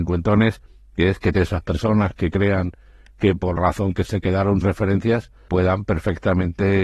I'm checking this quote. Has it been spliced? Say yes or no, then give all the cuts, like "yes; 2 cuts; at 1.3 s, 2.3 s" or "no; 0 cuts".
yes; 5 cuts; at 1.3 s, 3.6 s, 4.0 s, 4.6 s, 5.5 s